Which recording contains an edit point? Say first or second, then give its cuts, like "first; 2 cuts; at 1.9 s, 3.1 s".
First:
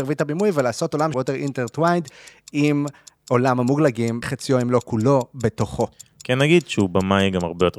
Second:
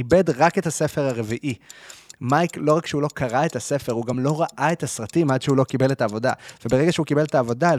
first; 2 cuts; at 1.1 s, 4.2 s